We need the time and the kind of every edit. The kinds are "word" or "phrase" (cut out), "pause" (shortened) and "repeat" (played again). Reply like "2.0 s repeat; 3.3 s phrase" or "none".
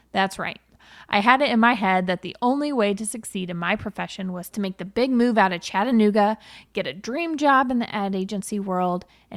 none